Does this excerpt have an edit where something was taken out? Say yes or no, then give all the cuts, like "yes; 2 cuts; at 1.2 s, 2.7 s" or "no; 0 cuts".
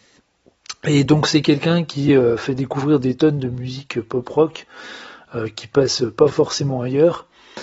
no; 0 cuts